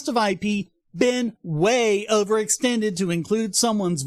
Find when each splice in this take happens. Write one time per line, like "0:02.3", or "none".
none